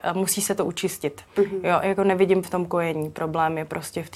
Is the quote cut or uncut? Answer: cut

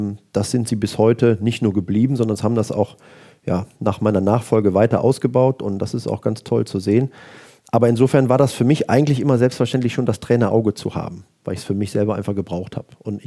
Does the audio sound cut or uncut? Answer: uncut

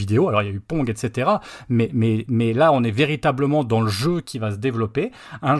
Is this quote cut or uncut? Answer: uncut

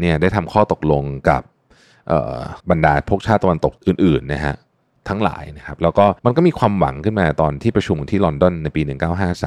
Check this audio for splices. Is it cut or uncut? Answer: cut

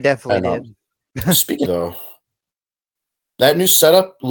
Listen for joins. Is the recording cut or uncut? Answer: cut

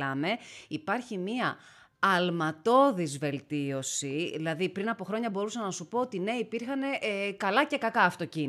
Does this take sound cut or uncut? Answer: uncut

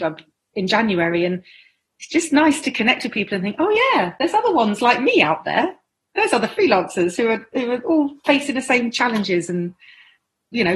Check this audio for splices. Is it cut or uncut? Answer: uncut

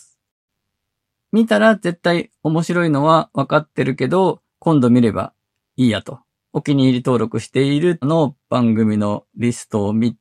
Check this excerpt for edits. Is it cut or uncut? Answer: cut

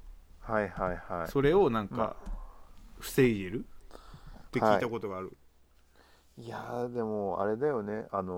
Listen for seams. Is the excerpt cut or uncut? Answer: uncut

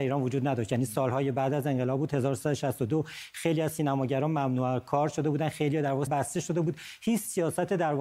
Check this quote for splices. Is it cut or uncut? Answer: cut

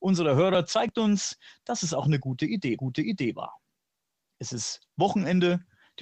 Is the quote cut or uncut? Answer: cut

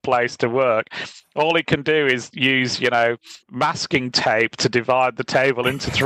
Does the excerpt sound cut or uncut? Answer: cut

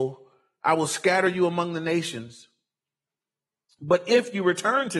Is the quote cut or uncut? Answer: uncut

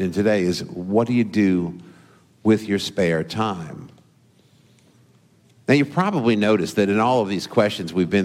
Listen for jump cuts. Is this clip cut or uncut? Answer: uncut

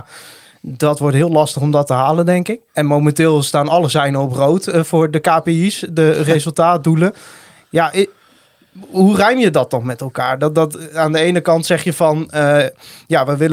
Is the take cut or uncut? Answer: cut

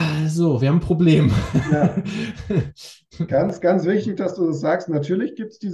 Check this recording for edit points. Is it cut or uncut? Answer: uncut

